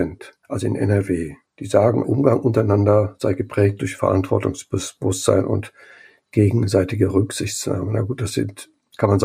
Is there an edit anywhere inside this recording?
yes; 1 cut; at 2.0 s

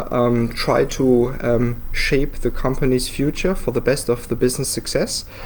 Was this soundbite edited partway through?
no; 0 cuts

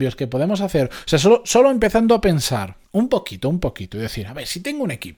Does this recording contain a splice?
yes; 1 cut; at 2.8 s

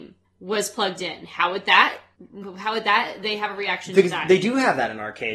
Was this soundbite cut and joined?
no; 0 cuts

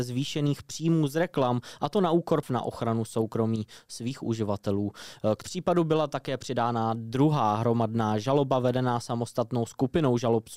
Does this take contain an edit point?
yes; 2 cuts; at 2.4 s, 5.4 s

